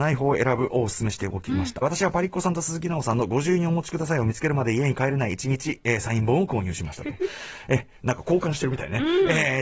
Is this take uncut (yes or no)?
no